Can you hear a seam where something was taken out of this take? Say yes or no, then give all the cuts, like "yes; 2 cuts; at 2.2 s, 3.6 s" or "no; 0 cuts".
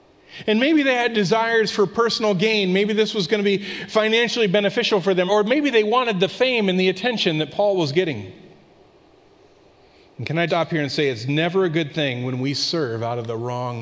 yes; 2 cuts; at 5.3 s, 10.5 s